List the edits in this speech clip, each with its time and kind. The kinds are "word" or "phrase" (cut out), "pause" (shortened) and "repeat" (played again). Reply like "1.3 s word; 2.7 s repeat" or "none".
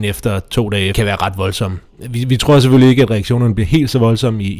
0.9 s word